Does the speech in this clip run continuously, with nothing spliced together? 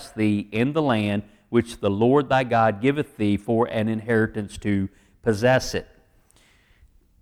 yes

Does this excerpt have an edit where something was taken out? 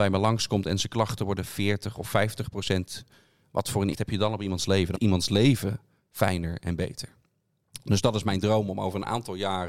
yes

